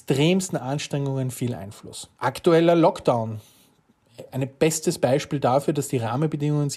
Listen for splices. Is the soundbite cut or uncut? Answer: cut